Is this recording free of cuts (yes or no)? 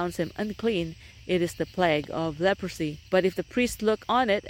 no